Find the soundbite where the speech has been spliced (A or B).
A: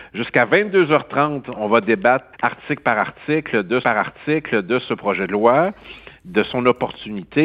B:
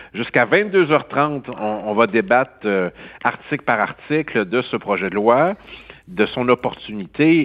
A